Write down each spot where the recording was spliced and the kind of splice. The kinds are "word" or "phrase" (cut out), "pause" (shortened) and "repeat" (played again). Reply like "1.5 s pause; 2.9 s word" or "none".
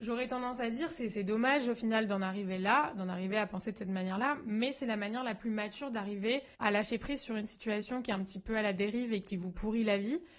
6.5 s pause